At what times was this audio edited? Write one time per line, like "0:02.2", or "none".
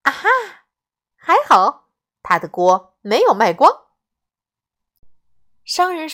none

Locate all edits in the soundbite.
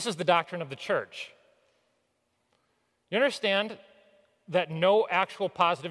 none

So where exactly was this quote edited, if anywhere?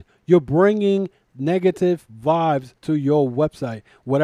0:02.8

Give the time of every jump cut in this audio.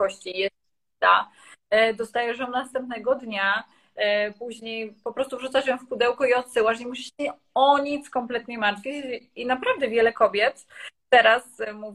none

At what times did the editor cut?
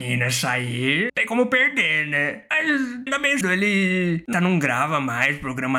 0:01.1
0:03.1
0:03.4
0:04.3

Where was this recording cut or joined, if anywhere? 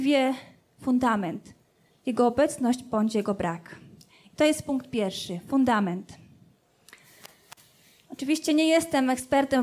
none

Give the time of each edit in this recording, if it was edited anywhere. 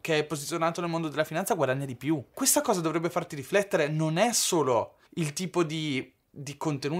0:05.1

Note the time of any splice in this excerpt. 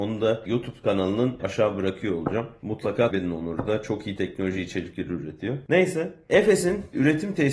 0:01.4
0:03.1

